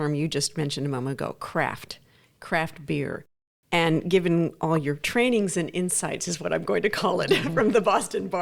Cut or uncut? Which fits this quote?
uncut